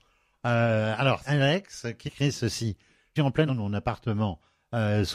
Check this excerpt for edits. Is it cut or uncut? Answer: cut